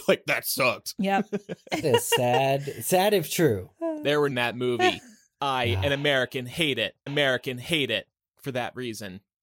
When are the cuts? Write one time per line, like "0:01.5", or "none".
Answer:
0:01.8
0:04.3
0:07.1